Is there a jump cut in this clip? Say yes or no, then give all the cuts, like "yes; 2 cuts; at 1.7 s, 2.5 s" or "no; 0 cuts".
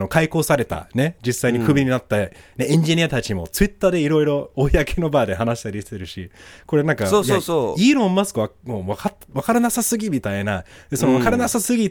no; 0 cuts